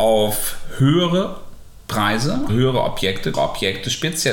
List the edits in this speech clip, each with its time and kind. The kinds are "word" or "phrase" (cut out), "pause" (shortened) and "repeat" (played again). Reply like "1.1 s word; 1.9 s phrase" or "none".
2.5 s word; 3.3 s word